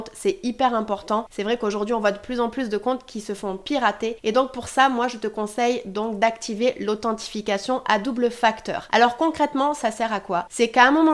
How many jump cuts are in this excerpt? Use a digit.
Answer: 0